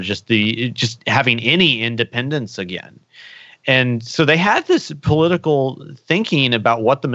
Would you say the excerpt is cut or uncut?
uncut